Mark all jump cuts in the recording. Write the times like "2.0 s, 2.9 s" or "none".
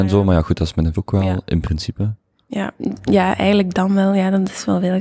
0.9 s, 3.1 s

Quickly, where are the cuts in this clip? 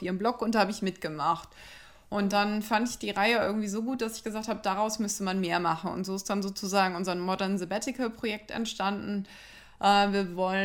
none

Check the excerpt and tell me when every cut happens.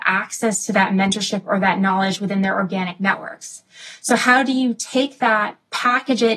none

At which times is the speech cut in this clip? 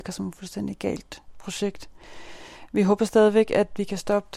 none

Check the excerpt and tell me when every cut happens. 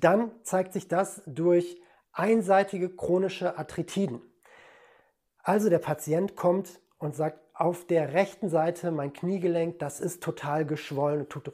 none

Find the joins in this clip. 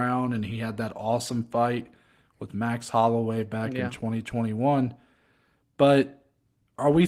none

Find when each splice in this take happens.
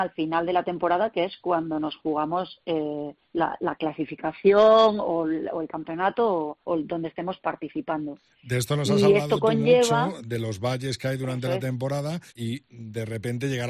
3.2 s, 6.6 s, 12.3 s

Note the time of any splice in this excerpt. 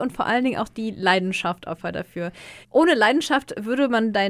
1.8 s, 2.6 s

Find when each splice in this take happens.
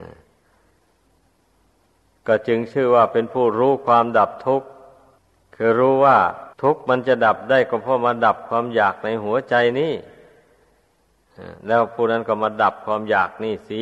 5.2 s, 6.5 s

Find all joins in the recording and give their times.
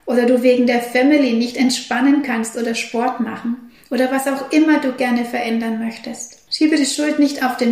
6.5 s

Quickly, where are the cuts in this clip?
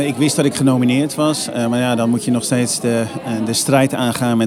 none

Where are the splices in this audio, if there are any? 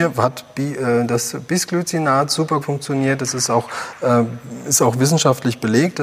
2.6 s

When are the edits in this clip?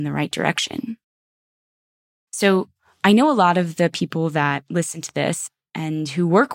none

